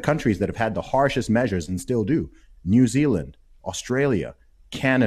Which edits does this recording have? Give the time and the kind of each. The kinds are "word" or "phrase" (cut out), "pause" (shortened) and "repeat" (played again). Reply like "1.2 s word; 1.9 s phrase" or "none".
none